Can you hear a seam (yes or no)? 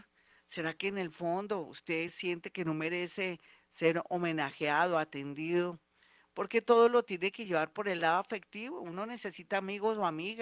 no